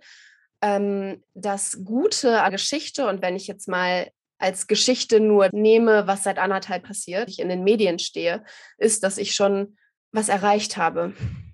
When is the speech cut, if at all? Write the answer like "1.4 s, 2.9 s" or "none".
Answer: 1.2 s, 2.5 s, 5.5 s, 6.8 s, 7.3 s, 10.0 s